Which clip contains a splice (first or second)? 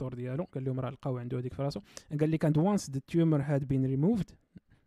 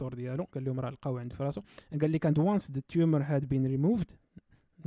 second